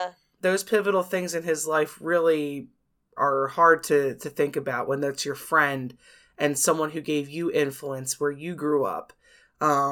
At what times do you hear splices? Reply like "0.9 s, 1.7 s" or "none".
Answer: 3.2 s